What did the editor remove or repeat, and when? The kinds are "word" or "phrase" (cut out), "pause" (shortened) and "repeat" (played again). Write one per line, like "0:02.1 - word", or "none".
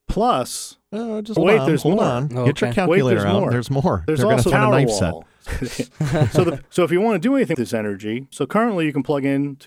0:01.4 - word
0:04.5 - word
0:05.5 - word
0:07.5 - word
0:08.3 - word